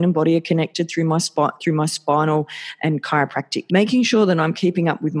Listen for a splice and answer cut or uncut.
cut